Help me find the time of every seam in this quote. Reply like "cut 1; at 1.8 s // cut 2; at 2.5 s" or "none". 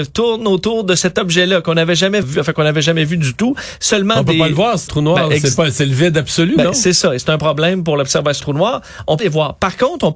cut 1; at 2.2 s // cut 2; at 4.9 s // cut 3; at 8.4 s // cut 4; at 9.2 s